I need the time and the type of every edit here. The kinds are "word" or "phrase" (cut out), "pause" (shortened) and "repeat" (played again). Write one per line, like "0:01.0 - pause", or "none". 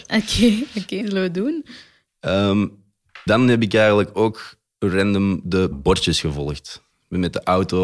0:01.0 - word
0:03.3 - word
0:05.7 - word